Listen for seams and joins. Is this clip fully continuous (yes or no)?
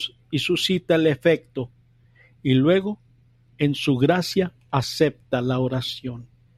yes